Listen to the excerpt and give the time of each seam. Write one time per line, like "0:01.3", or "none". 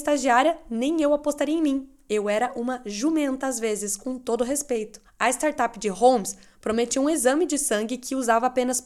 0:05.0